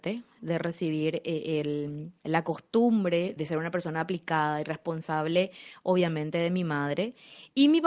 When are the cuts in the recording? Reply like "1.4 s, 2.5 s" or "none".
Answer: 2.2 s, 3.4 s